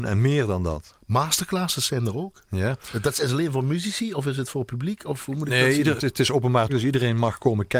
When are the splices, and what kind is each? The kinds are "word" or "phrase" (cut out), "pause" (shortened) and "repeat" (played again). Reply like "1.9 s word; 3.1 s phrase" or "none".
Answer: 6.0 s word; 6.7 s word